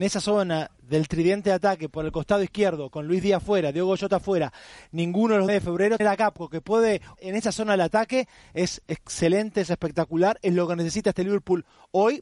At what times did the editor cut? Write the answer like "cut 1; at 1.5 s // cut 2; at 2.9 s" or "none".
cut 1; at 5.5 s // cut 2; at 6.0 s // cut 3; at 7.1 s